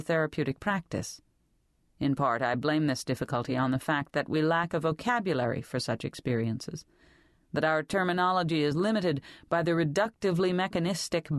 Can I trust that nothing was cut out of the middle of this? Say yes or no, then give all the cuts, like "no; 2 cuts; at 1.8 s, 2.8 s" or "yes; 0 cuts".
yes; 0 cuts